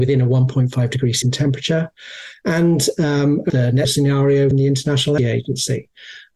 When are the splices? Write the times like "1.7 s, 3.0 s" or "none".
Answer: 1.2 s, 3.5 s, 3.8 s, 4.5 s, 5.2 s